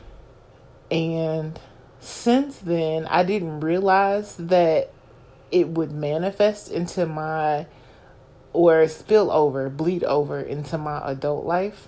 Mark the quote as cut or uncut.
uncut